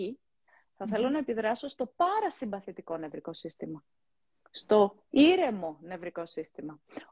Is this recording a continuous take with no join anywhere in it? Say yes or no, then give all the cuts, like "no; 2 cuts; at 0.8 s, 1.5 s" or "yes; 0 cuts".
yes; 0 cuts